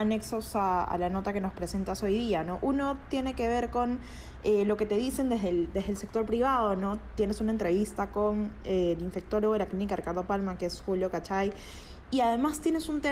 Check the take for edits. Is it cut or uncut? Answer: uncut